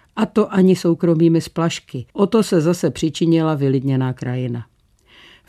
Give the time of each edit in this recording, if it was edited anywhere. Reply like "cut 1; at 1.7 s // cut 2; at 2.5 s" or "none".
cut 1; at 2.1 s